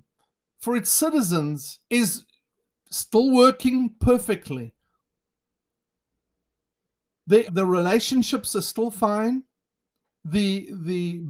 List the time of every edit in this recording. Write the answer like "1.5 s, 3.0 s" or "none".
1.8 s, 7.5 s